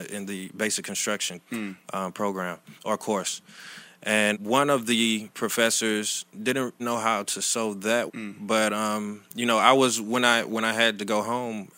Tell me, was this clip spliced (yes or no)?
yes